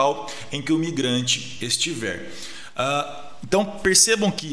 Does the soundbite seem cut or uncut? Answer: uncut